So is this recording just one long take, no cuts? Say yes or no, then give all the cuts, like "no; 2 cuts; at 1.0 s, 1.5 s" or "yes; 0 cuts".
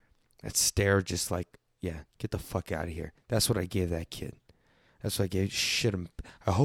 yes; 0 cuts